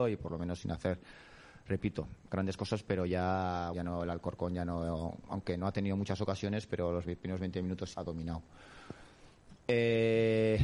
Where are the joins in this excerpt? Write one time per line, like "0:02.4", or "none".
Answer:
0:03.7
0:07.9